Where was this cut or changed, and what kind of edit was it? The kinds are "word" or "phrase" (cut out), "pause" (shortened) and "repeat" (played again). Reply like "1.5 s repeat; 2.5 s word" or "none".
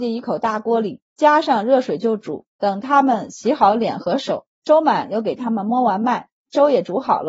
1.1 s pause; 2.5 s pause; 4.5 s pause